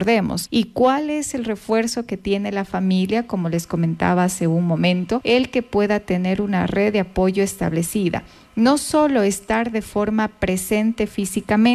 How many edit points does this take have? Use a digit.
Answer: 0